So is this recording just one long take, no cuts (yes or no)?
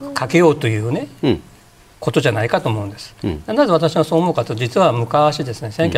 yes